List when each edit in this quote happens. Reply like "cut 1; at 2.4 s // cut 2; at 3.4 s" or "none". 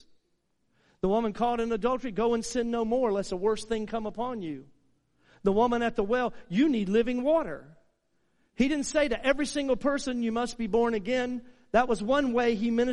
none